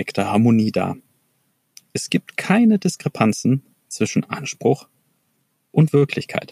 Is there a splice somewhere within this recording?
no; 0 cuts

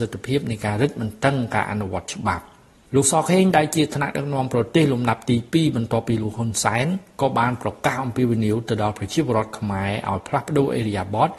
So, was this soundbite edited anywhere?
no; 0 cuts

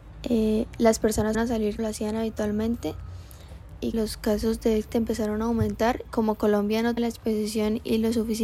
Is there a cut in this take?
yes; 6 cuts; at 1.3 s, 1.8 s, 3.9 s, 4.9 s, 6.0 s, 7.0 s

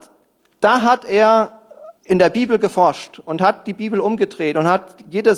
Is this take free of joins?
no; 1 cut; at 2.0 s

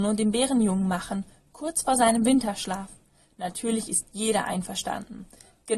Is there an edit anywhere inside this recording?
no; 0 cuts

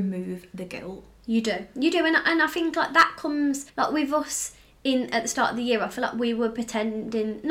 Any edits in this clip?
yes; 1 cut; at 3.7 s

